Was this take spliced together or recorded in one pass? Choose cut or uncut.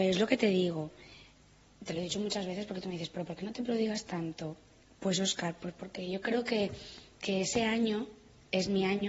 uncut